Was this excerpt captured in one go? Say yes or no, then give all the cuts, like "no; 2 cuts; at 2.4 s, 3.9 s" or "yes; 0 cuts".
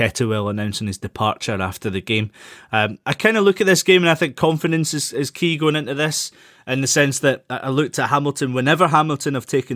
yes; 0 cuts